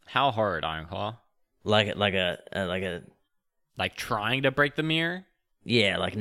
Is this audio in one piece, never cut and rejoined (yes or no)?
yes